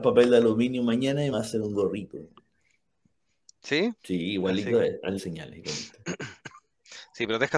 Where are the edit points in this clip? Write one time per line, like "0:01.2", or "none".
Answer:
0:01.3
0:04.0
0:05.2

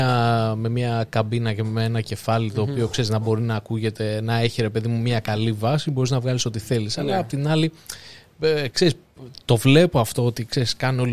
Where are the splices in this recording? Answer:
none

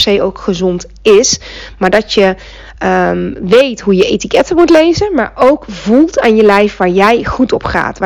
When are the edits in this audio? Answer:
none

